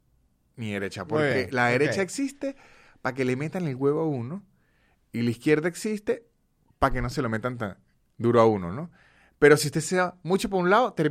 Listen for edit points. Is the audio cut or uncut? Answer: uncut